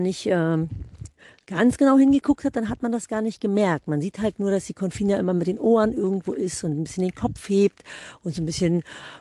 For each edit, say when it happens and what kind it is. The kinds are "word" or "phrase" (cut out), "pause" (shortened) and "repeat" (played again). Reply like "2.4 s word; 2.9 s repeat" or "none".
none